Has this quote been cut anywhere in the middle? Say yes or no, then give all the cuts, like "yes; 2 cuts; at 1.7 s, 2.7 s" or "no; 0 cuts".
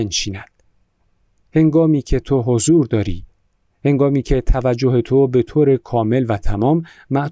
no; 0 cuts